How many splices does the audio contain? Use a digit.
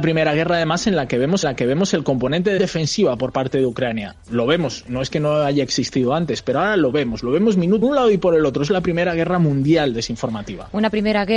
3